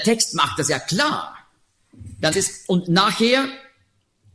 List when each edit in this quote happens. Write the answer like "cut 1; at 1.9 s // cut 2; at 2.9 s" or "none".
cut 1; at 2.3 s